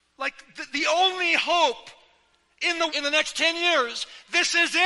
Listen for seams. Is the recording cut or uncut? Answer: cut